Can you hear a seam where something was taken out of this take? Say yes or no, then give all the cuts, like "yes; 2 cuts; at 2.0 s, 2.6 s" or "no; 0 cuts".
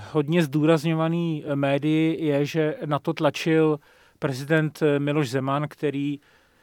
no; 0 cuts